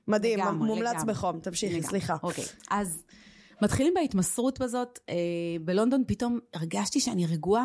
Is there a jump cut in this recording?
no; 0 cuts

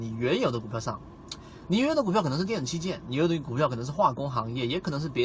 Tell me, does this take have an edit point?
no; 0 cuts

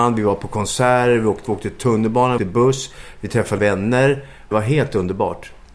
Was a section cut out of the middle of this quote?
yes; 4 cuts; at 1.5 s, 2.4 s, 3.6 s, 4.5 s

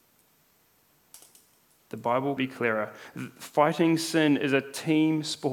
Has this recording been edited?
yes; 1 cut; at 2.4 s

